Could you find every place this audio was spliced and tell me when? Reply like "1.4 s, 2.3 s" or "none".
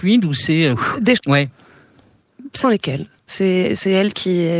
1.2 s, 2.6 s